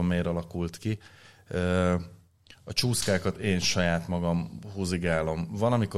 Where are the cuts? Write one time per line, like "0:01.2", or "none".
none